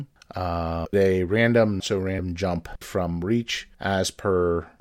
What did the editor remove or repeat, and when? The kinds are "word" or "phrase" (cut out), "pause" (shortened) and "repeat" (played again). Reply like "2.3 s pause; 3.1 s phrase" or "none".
0.9 s word; 1.8 s word; 2.8 s word; 3.7 s pause